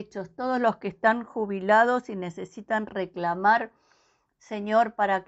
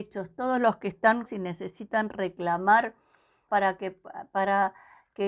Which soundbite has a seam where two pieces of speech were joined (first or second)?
second